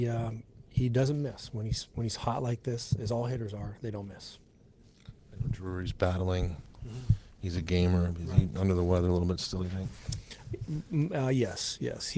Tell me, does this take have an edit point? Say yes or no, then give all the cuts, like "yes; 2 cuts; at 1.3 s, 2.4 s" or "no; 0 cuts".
no; 0 cuts